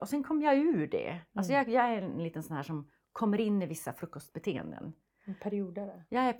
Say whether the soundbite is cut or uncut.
uncut